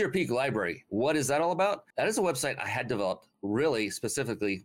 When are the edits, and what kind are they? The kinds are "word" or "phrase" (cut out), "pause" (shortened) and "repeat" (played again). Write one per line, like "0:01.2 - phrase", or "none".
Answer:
0:01.9 - pause